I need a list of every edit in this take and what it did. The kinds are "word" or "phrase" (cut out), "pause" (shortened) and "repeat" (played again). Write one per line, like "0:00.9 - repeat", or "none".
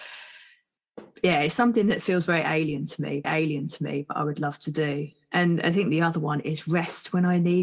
0:03.2 - repeat

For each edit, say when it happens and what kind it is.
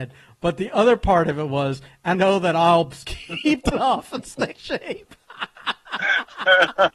0:02.1 - word
0:03.7 - word
0:04.5 - word

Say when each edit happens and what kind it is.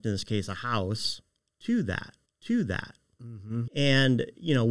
0:02.3 - repeat
0:03.7 - word

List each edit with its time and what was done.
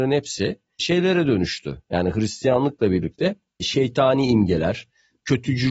none

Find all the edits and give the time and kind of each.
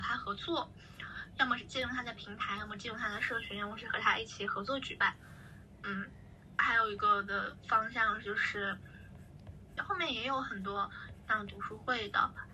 0:09.8 - word

